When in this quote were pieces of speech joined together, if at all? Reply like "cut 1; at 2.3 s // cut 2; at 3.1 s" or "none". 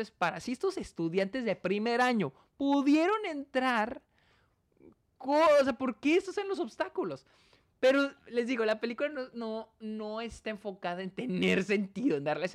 none